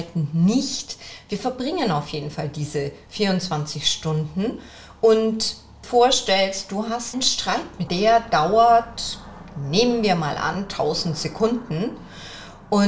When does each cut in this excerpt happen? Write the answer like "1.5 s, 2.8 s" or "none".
5.8 s, 7.1 s, 7.9 s